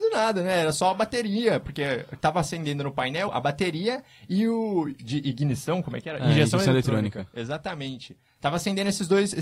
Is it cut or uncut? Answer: cut